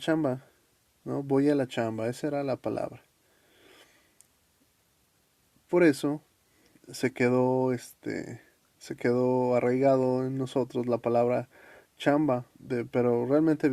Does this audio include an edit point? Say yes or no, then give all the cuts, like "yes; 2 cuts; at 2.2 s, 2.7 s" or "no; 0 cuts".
yes; 1 cut; at 12.5 s